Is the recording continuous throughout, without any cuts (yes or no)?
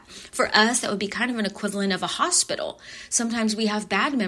yes